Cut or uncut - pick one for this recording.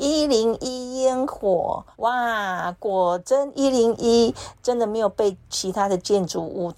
cut